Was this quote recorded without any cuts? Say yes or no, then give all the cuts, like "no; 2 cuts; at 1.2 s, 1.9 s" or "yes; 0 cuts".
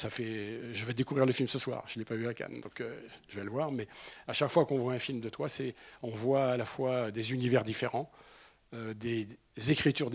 yes; 0 cuts